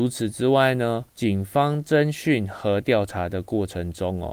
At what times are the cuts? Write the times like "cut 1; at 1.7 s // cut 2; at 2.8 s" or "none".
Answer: cut 1; at 1.1 s